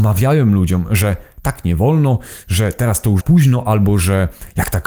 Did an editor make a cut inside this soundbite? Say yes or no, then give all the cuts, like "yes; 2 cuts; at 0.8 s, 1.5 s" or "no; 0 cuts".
yes; 1 cut; at 3.2 s